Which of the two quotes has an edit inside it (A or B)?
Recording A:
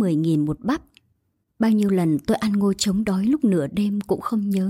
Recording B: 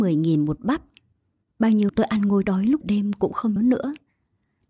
B